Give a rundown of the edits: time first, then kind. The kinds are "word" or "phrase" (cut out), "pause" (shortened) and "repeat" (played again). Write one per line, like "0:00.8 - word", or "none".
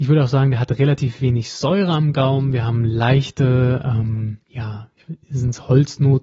0:04.4 - pause